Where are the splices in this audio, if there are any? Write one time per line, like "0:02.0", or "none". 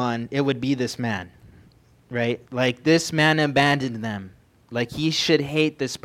0:02.5